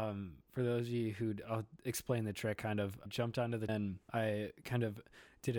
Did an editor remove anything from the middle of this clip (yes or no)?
yes